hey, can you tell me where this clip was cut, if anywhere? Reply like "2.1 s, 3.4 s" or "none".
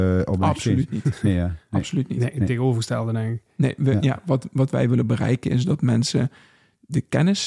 none